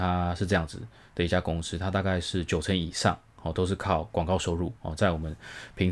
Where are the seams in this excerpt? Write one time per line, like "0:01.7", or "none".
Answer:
0:04.8